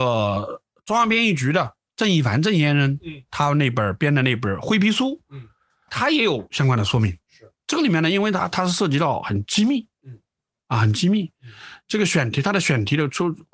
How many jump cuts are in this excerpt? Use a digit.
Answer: 1